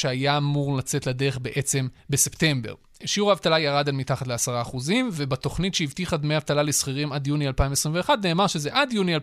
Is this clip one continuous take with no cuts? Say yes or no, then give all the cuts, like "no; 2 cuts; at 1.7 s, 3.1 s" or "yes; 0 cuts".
no; 1 cut; at 2.0 s